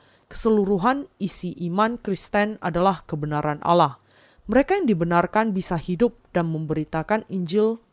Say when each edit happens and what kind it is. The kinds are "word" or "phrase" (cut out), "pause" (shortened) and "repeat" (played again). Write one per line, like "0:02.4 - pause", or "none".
none